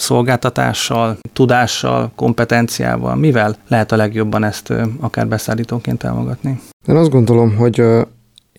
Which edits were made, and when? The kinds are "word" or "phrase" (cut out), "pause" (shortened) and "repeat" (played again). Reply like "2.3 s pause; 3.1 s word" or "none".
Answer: 3.6 s pause